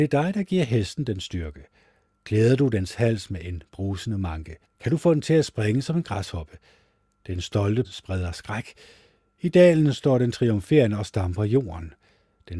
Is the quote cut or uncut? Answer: cut